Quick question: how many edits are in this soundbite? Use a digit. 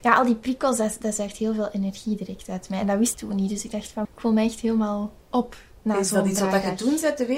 2